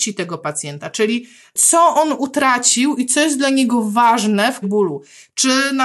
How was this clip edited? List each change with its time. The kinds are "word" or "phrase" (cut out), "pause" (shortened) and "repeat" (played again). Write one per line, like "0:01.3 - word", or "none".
0:04.6 - word